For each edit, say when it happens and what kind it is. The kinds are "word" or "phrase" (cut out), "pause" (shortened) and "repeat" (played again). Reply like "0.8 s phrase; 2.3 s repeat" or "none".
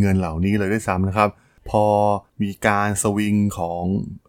none